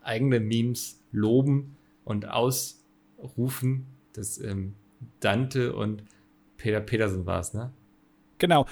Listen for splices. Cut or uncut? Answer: uncut